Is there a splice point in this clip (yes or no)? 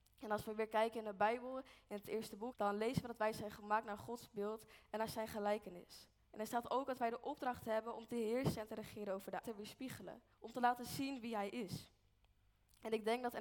yes